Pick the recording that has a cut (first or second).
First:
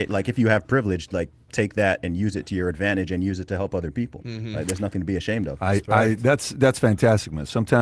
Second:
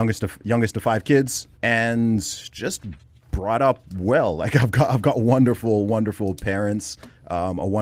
second